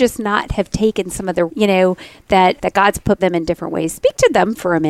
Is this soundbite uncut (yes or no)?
no